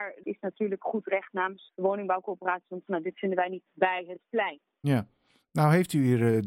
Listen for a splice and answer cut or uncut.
cut